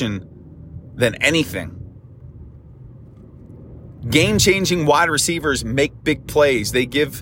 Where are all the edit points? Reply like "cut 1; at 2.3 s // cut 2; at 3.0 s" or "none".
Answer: none